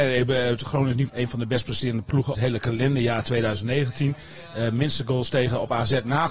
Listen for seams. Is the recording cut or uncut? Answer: cut